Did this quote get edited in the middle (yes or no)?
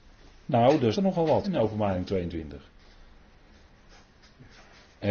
yes